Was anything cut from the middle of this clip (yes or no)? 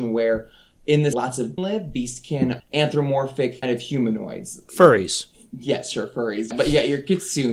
yes